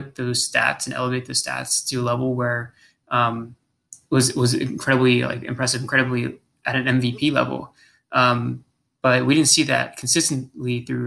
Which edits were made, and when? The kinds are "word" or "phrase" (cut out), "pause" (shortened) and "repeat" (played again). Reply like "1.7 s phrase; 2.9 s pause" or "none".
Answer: none